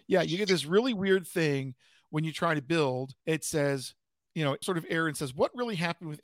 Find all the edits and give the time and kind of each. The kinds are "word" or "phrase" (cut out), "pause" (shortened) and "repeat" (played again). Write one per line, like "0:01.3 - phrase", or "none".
0:03.2 - pause
0:04.6 - word